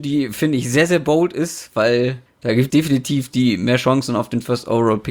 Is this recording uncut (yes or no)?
no